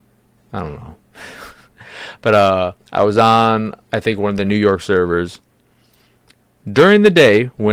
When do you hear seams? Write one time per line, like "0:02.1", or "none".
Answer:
0:02.8